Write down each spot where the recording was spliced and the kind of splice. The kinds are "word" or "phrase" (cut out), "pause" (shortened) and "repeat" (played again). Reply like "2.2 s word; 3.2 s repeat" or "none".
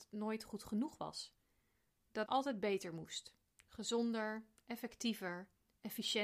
2.3 s word

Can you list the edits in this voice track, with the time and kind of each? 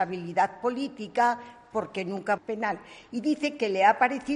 2.4 s phrase

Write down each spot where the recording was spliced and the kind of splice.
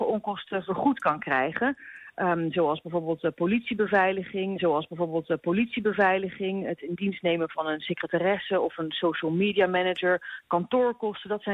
4.6 s repeat

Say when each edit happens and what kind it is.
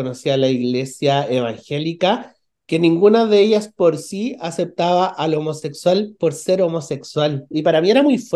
none

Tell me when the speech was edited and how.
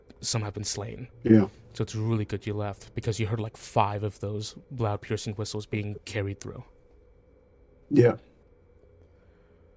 1.1 s pause

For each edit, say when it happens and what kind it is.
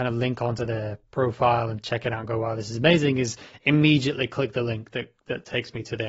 none

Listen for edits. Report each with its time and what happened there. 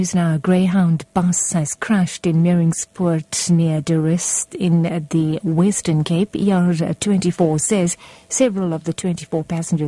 none

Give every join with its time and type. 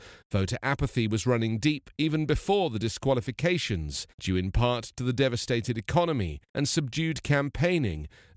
4.1 s pause; 6.5 s pause

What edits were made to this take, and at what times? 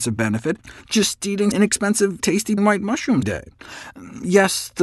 1.5 s word; 2.2 s word; 2.6 s word; 3.2 s word

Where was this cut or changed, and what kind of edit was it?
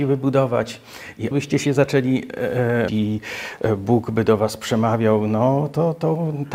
1.3 s word; 2.9 s word

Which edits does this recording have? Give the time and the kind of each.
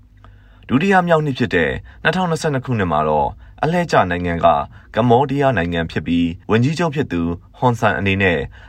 6.4 s pause

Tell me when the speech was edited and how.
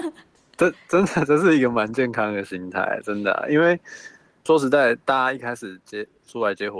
4.5 s word

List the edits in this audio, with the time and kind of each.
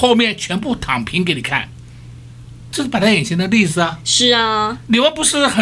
2.7 s word

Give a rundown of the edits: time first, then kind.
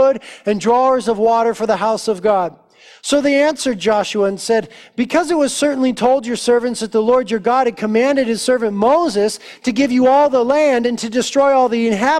none

